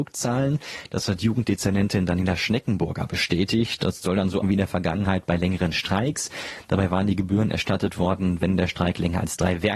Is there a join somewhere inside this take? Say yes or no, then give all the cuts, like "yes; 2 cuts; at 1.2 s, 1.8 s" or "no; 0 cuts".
yes; 1 cut; at 4.4 s